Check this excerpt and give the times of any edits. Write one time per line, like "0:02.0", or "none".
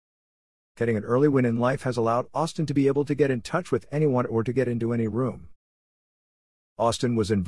none